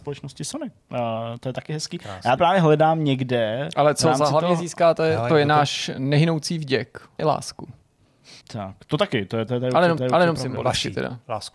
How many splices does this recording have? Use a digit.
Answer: 5